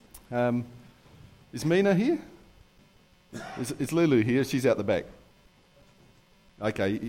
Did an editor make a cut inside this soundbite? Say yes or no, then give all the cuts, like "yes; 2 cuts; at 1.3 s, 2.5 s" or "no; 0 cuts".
no; 0 cuts